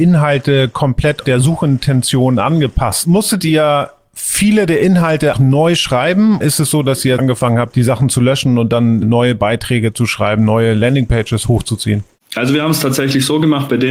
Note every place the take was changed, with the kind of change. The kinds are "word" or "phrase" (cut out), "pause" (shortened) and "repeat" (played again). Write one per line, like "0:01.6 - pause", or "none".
0:05.3 - word
0:06.4 - word
0:07.2 - word
0:09.0 - word